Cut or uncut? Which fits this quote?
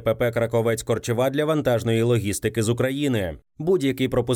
uncut